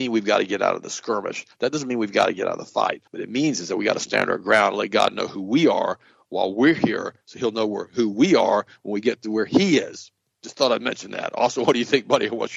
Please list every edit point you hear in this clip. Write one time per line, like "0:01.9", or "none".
0:03.1